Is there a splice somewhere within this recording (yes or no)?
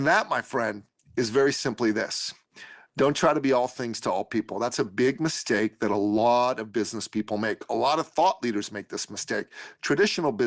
no